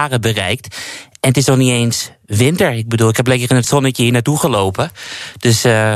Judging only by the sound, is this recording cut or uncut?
uncut